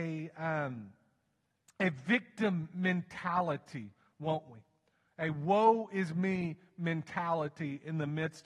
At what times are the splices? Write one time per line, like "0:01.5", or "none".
none